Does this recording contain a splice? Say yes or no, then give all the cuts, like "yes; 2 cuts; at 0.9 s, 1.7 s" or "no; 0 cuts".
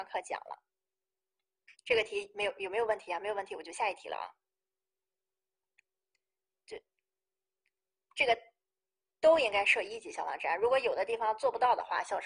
yes; 1 cut; at 1.7 s